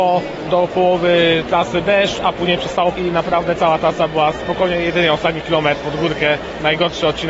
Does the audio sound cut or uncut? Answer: cut